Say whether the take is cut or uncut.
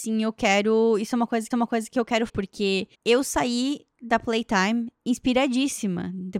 cut